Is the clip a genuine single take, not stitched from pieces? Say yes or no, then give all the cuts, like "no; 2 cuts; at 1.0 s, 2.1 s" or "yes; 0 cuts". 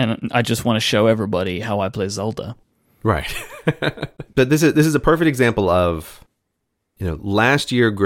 yes; 0 cuts